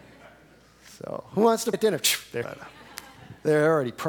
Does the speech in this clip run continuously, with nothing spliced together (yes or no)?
no